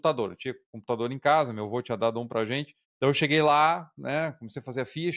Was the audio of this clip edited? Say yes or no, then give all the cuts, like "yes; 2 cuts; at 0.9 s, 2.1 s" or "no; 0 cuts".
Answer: yes; 1 cut; at 2.8 s